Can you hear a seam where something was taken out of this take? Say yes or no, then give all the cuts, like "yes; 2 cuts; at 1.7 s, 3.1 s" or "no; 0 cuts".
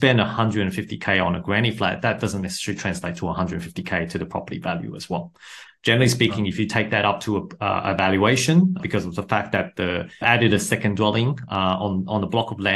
yes; 2 cuts; at 8.8 s, 10.2 s